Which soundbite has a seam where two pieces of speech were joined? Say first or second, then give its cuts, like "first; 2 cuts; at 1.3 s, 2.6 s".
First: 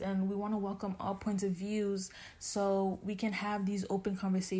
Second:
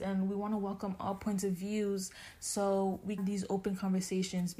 second; 1 cut; at 3.2 s